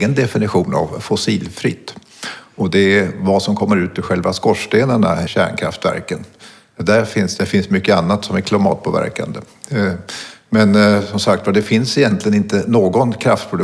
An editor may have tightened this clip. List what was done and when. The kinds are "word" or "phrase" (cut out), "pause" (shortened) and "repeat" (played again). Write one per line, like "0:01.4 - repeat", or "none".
0:05.3 - word
0:07.4 - phrase